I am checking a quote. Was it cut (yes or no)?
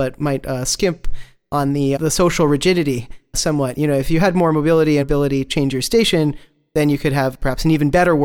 yes